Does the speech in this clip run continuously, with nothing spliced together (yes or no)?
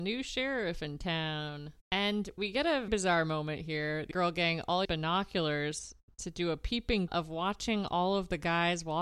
no